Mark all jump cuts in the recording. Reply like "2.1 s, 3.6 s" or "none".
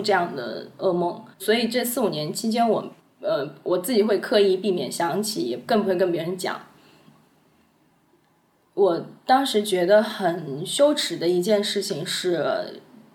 1.3 s, 3.0 s, 9.2 s